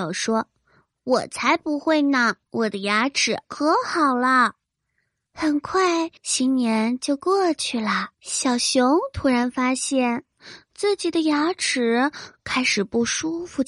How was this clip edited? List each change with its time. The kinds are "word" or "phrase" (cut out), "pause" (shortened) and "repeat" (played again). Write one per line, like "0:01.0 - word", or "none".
0:02.4 - pause
0:03.4 - pause
0:04.6 - pause
0:06.2 - pause
0:08.1 - pause

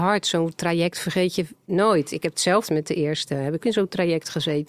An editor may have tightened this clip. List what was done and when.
0:02.6 - word
0:03.6 - word

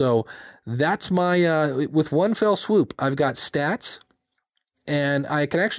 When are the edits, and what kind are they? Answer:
none

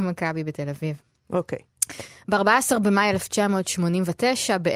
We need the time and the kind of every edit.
none

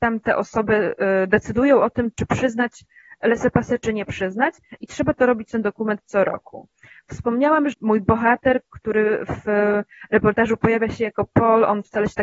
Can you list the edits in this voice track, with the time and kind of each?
0:02.1 - word
0:05.5 - word
0:07.7 - word

